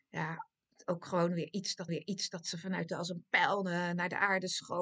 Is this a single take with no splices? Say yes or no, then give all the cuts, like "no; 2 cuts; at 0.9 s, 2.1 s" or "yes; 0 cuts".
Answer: no; 2 cuts; at 1.9 s, 2.9 s